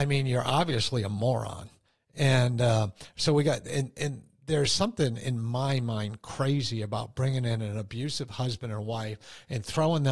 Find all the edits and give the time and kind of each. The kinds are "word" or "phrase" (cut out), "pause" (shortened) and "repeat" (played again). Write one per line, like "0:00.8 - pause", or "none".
none